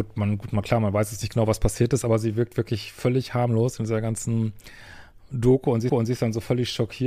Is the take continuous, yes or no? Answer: no